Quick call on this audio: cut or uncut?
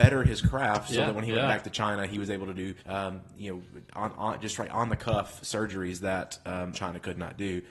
cut